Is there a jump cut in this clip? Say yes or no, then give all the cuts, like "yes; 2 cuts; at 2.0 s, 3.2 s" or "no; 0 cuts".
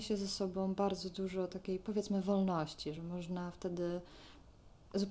no; 0 cuts